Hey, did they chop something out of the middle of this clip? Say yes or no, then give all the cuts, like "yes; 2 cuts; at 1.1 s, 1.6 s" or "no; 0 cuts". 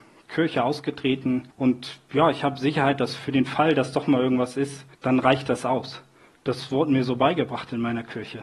yes; 2 cuts; at 1.5 s, 4.9 s